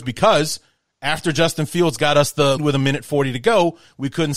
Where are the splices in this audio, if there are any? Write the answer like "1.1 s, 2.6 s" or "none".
2.6 s

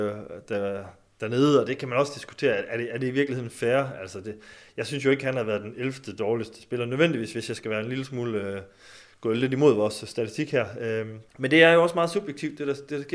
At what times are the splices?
11.3 s

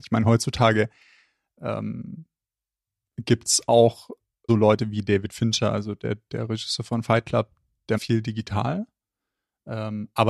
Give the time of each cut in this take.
4.5 s, 8.0 s

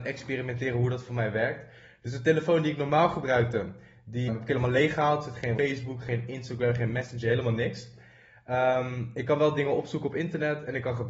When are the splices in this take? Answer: 4.3 s, 5.6 s

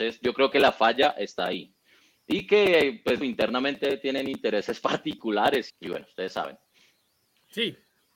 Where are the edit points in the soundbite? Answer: 3.2 s, 5.7 s

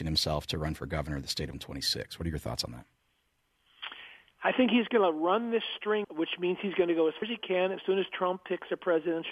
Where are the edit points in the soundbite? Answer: 1.5 s, 6.0 s, 7.2 s, 7.8 s

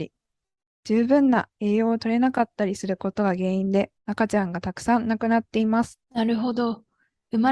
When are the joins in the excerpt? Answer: 4.0 s, 6.0 s

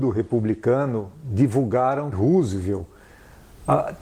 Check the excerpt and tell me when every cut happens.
2.1 s

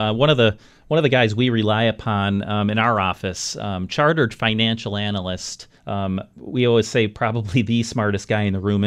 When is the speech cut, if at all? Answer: 5.8 s

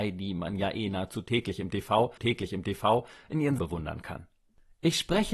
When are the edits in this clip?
2.2 s, 3.6 s

